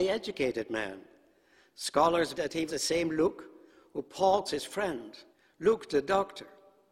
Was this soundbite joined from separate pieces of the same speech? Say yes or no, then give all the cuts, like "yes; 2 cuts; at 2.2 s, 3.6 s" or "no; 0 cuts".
yes; 4 cuts; at 2.3 s, 2.7 s, 4.5 s, 5.3 s